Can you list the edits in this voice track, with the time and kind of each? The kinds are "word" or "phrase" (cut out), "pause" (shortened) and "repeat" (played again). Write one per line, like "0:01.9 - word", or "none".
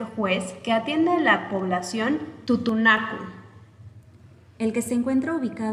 none